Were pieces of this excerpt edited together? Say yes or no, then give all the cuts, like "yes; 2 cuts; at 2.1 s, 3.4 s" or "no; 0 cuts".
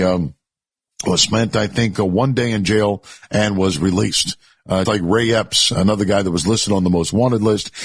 yes; 1 cut; at 4.8 s